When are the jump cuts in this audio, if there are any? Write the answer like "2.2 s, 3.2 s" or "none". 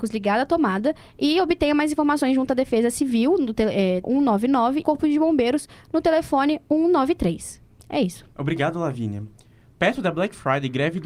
4.0 s, 4.8 s, 8.3 s